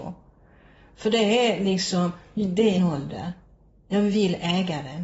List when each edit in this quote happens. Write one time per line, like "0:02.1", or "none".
0:02.8